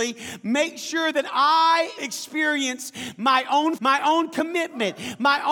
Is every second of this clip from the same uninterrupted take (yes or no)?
no